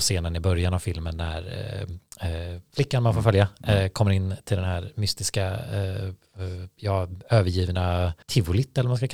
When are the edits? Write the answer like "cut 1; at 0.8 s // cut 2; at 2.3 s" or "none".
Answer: cut 1; at 8.2 s